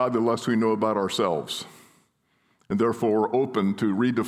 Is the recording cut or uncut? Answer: uncut